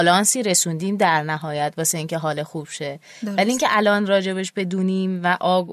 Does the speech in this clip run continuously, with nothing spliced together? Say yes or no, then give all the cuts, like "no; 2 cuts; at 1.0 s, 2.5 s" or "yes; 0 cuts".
yes; 0 cuts